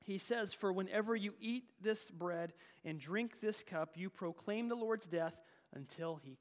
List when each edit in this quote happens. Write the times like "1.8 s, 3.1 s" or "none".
none